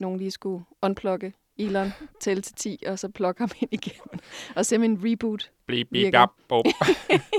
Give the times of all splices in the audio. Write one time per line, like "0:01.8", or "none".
none